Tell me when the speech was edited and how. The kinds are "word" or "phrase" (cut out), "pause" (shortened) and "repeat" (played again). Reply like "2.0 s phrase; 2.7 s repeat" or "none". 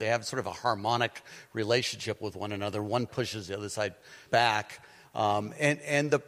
3.1 s word; 4.3 s word